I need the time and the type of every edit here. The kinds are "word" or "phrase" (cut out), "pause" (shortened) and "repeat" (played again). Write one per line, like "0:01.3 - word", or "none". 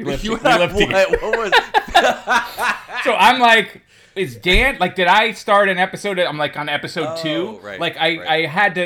none